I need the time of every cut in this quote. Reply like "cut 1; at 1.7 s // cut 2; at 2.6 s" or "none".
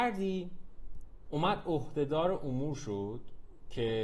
none

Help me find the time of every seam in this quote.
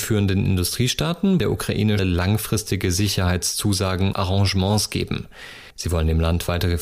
cut 1; at 1.4 s // cut 2; at 2.0 s // cut 3; at 4.1 s // cut 4; at 5.7 s

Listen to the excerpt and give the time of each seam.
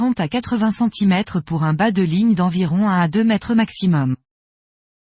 none

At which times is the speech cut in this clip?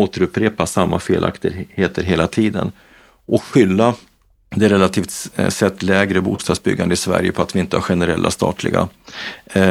none

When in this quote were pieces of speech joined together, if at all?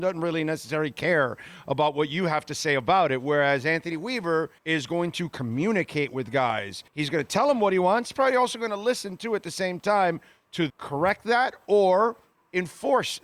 cut 1; at 4.6 s // cut 2; at 6.9 s // cut 3; at 8.1 s // cut 4; at 10.7 s

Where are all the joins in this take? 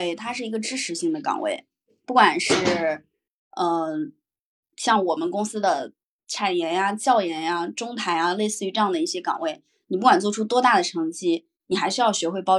none

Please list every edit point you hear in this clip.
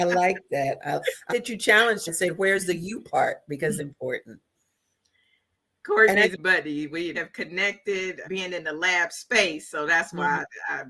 cut 1; at 1.3 s // cut 2; at 2.1 s // cut 3; at 3.8 s // cut 4; at 6.4 s // cut 5; at 7.1 s // cut 6; at 8.2 s

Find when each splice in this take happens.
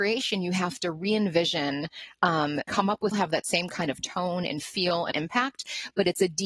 cut 1; at 2.7 s // cut 2; at 3.1 s // cut 3; at 5.1 s

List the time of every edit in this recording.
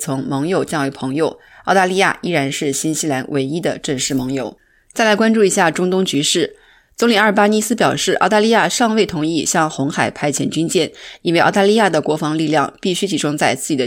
none

